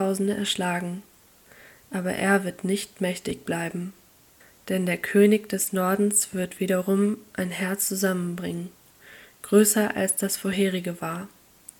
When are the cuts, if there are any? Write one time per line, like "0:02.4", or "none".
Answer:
none